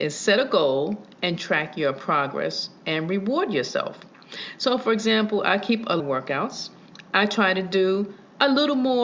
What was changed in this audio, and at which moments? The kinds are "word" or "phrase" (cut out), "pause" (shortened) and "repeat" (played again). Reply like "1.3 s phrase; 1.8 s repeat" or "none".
6.0 s phrase